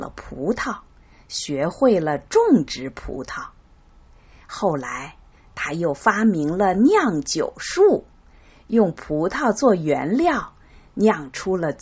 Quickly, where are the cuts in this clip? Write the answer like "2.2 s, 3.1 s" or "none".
none